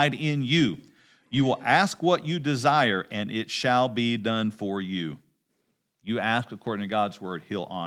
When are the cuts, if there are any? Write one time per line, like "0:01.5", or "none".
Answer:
none

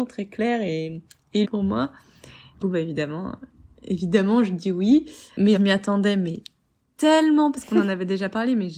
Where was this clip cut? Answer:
0:01.4
0:02.6
0:05.6
0:07.5

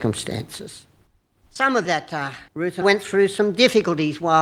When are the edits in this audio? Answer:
0:01.1
0:01.8
0:02.5
0:02.8

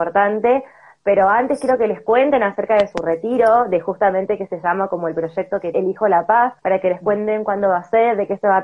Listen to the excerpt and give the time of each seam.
0:05.7
0:06.6

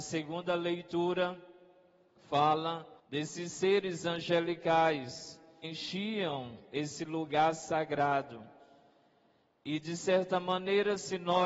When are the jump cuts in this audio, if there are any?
0:03.0
0:05.6

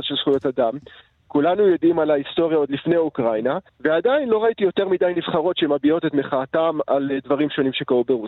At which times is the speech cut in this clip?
0:03.7

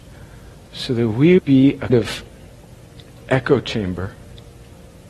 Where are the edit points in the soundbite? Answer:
0:01.4
0:01.9
0:03.2

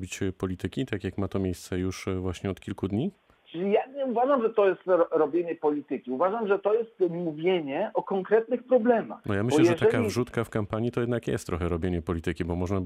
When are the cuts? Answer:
0:03.4

